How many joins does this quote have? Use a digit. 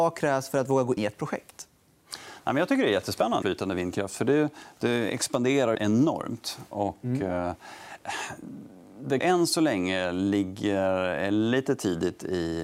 4